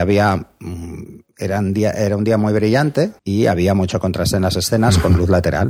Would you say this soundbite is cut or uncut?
cut